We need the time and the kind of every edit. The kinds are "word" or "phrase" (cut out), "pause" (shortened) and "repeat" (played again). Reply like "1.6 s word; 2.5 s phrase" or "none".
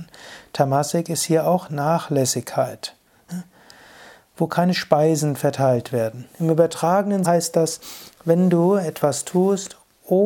7.2 s word